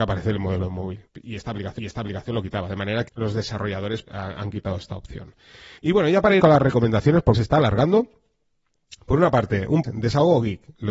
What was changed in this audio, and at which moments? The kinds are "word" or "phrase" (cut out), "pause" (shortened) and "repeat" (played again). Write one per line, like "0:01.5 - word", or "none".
0:01.1 - pause
0:01.8 - repeat
0:03.1 - word
0:04.0 - word
0:05.8 - pause
0:06.4 - phrase
0:07.3 - word
0:09.8 - word